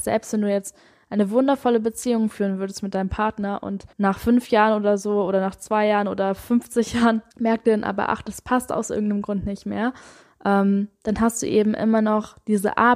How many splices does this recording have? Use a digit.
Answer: 2